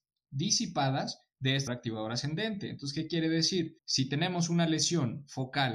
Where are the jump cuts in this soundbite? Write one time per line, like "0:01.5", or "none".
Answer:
0:01.7
0:03.8